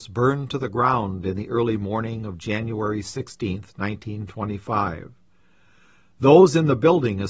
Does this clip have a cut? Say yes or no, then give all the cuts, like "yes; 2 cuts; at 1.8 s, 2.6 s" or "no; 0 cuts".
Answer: no; 0 cuts